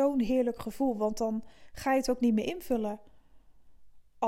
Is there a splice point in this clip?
no; 0 cuts

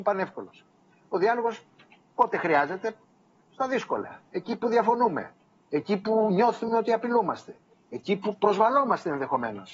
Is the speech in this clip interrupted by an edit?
no; 0 cuts

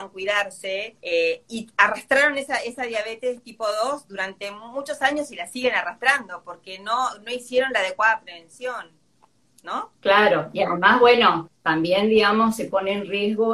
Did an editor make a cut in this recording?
yes; 2 cuts; at 1.0 s, 10.0 s

